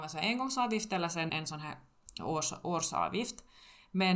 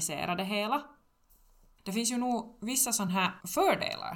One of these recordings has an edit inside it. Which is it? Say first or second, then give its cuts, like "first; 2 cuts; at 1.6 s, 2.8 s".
first; 1 cut; at 1.3 s